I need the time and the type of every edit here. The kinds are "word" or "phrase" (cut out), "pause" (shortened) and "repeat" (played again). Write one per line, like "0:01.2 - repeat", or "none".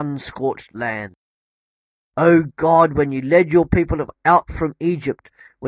none